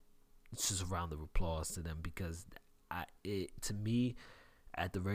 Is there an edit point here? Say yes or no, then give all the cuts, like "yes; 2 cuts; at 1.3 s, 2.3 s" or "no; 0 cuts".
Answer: no; 0 cuts